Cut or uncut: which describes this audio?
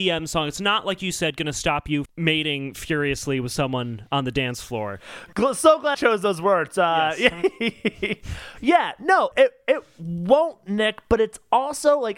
cut